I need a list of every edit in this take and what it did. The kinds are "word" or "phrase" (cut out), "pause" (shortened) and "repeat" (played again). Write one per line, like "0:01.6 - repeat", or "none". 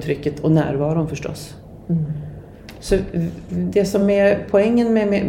none